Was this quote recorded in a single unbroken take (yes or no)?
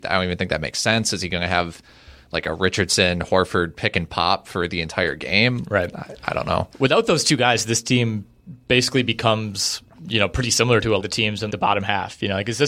no